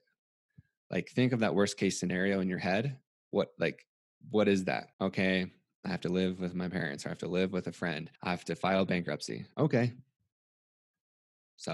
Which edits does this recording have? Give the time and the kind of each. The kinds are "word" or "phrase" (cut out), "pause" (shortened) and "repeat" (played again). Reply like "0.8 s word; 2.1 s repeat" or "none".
3.1 s pause; 4.0 s pause; 4.9 s pause; 8.2 s pause